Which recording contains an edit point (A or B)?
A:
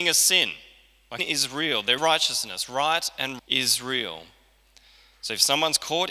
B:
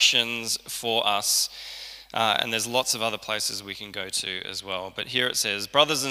A